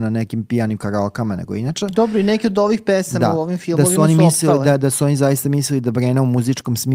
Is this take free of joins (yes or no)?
yes